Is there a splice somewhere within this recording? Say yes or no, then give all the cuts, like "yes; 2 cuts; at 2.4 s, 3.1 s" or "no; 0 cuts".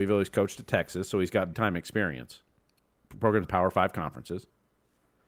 yes; 2 cuts; at 1.5 s, 3.4 s